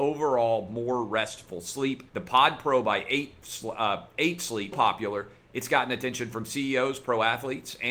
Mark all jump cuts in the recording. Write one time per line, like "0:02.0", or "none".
0:02.1
0:04.7